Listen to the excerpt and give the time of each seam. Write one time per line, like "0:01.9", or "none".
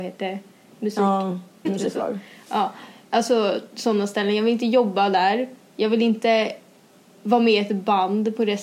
0:01.6